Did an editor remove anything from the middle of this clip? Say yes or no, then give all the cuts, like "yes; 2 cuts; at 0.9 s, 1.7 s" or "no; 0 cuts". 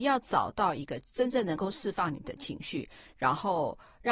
no; 0 cuts